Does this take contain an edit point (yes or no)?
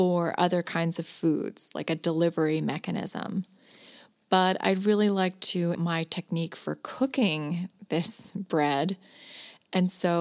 yes